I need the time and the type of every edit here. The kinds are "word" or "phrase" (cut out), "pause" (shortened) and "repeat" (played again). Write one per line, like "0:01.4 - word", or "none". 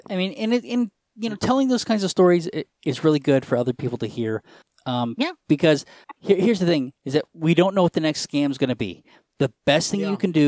none